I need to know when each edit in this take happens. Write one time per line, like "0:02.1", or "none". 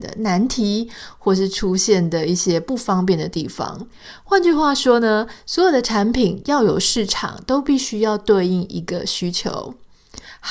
none